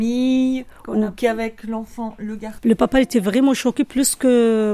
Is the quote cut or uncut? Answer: uncut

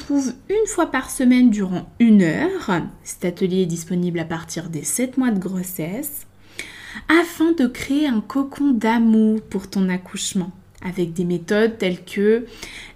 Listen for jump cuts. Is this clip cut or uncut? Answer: uncut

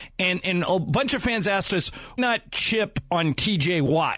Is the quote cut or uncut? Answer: cut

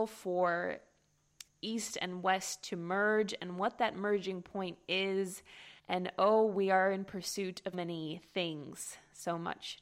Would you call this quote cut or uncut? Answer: cut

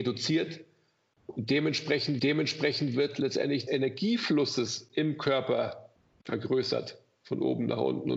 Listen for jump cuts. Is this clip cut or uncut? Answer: cut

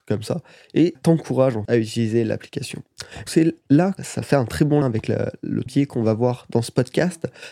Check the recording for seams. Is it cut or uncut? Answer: cut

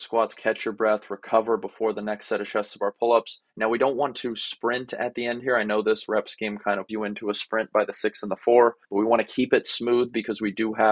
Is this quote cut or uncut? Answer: cut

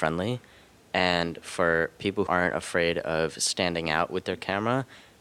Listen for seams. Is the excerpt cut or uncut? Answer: cut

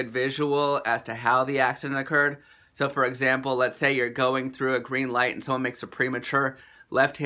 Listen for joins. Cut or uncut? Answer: uncut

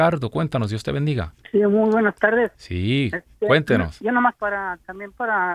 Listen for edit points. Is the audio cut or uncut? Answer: cut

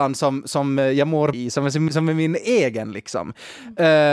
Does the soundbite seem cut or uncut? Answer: cut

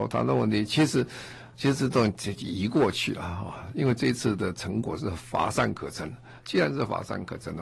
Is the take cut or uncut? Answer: cut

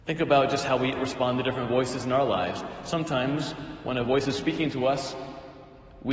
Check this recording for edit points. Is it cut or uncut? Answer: uncut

